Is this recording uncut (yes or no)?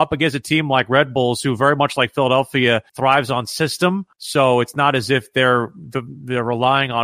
no